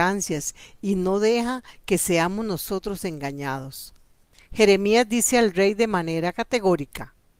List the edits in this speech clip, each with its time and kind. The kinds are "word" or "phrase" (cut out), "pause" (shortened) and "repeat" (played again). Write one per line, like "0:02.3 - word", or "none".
none